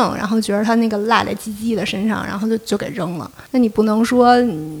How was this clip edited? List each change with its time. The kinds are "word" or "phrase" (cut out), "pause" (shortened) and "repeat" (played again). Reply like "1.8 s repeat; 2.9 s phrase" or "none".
3.5 s pause